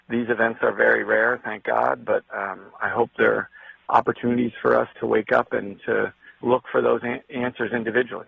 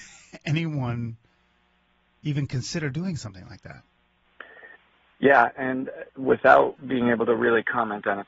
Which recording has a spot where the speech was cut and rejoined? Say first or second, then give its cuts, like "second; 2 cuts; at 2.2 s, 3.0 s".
first; 2 cuts; at 4.9 s, 6.4 s